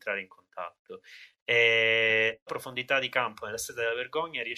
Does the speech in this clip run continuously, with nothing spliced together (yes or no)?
no